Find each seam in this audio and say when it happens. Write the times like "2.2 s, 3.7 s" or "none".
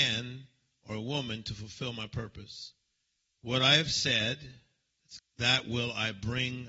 5.2 s